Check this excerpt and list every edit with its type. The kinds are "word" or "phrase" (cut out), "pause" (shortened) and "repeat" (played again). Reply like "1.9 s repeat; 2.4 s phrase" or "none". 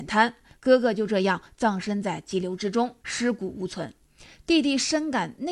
3.0 s pause